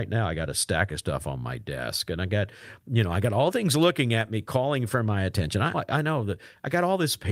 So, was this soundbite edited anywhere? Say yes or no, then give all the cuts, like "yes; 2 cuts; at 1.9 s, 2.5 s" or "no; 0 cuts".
yes; 2 cuts; at 3.5 s, 5.7 s